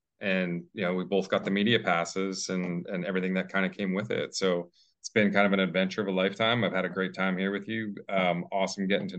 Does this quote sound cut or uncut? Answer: uncut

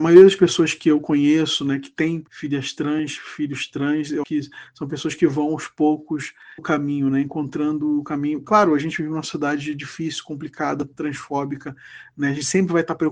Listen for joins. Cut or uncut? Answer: cut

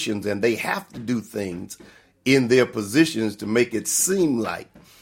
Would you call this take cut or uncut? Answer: uncut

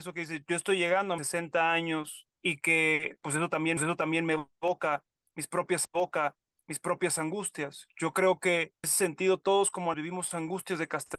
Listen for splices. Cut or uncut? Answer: cut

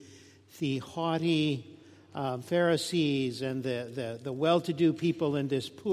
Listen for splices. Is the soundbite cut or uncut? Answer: uncut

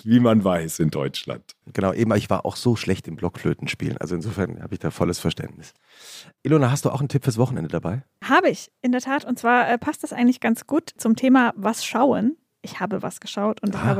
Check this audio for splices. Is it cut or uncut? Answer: uncut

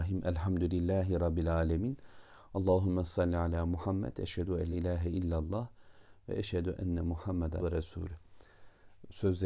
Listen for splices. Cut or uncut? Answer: cut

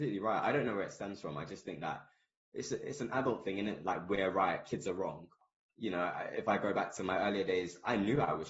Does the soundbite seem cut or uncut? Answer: uncut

